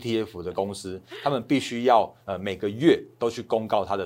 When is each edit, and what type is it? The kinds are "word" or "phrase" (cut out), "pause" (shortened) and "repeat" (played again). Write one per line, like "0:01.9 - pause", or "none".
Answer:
0:02.2 - pause

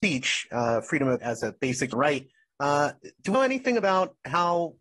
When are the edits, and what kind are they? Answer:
0:01.2 - word
0:01.9 - word
0:03.3 - word

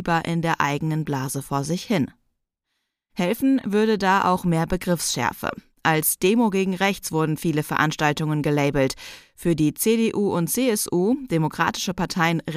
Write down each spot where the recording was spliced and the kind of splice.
none

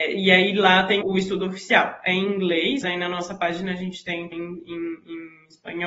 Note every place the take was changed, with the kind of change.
0:01.0 - word
0:02.8 - word
0:04.3 - word

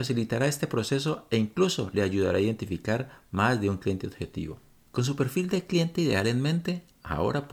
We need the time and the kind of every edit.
none

